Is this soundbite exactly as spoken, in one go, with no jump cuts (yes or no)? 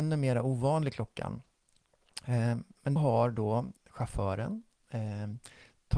no